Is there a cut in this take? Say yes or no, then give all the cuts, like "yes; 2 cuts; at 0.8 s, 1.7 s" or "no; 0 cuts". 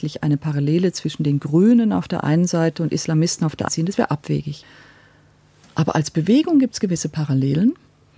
yes; 1 cut; at 3.7 s